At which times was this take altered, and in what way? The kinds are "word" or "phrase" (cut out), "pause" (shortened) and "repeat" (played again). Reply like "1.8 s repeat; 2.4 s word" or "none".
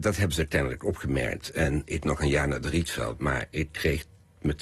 2.0 s word